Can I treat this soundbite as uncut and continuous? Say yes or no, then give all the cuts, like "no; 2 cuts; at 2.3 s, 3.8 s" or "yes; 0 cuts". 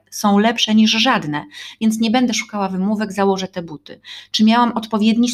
yes; 0 cuts